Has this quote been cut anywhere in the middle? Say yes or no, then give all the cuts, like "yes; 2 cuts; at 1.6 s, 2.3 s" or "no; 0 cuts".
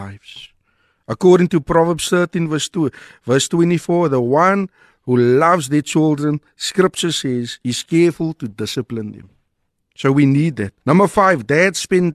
yes; 2 cuts; at 7.6 s, 10.8 s